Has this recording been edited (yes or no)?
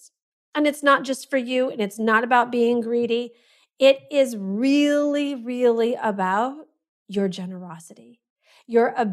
no